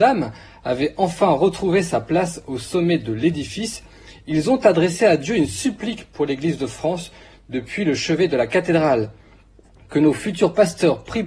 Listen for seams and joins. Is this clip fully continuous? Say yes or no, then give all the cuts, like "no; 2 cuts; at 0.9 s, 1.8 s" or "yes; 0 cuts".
yes; 0 cuts